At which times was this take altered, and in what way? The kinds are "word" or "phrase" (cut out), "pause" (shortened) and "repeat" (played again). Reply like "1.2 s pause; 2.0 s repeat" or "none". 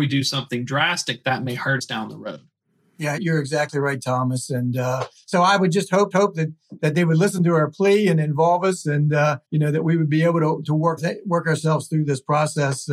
3.2 s word; 6.1 s repeat; 9.4 s pause; 11.0 s word